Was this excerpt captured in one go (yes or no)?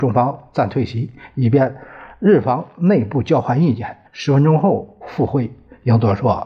no